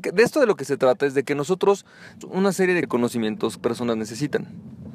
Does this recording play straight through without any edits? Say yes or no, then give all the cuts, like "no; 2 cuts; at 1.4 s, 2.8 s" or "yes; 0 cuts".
no; 3 cuts; at 2.2 s, 2.8 s, 3.6 s